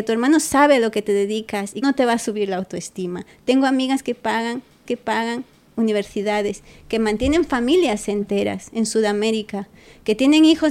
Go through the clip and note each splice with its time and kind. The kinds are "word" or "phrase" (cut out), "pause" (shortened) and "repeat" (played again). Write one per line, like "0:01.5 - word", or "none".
0:01.8 - phrase
0:04.9 - repeat

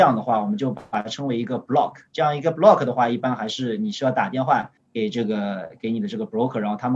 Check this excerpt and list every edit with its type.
0:04.8 - pause

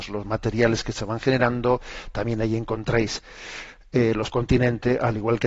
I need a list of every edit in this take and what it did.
0:04.3 - phrase

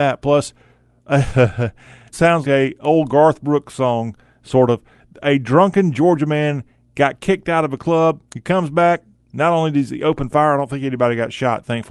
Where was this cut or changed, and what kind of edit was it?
0:02.1 - word
0:02.4 - word
0:08.3 - pause

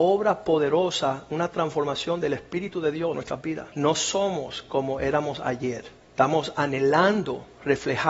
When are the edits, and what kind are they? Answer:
0:03.1 - word
0:03.7 - pause
0:06.0 - pause

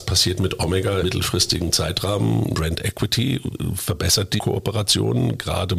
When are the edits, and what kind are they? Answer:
0:01.0 - word
0:02.5 - phrase
0:04.4 - phrase

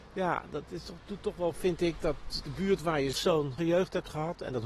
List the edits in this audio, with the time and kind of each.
0:01.5 - word
0:02.4 - word
0:03.1 - word
0:03.6 - word

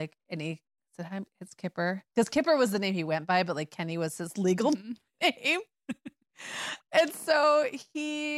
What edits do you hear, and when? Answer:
0:02.1 - pause

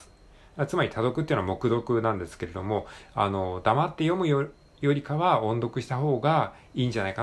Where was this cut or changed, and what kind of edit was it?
none

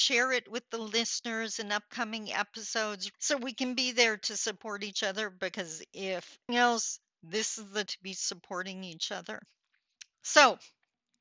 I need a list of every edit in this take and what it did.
0:03.1 - word
0:06.5 - word
0:07.9 - word

